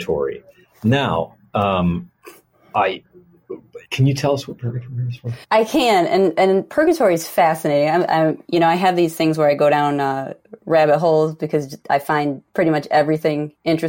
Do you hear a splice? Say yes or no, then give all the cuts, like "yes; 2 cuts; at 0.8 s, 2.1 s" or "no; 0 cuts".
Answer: yes; 2 cuts; at 3.9 s, 5.4 s